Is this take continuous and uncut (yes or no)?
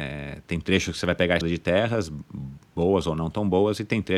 no